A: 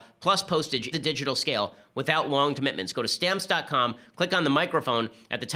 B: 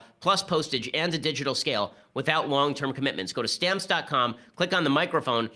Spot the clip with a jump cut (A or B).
A